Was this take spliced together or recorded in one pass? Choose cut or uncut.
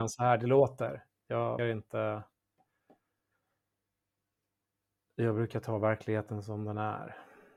cut